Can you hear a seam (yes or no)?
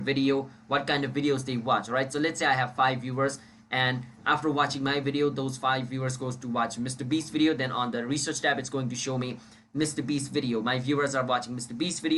no